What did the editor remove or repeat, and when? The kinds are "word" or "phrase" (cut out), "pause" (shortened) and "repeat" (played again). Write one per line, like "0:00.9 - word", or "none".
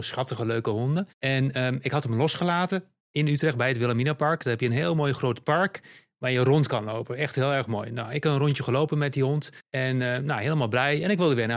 0:01.1 - pause
0:03.0 - pause
0:09.6 - pause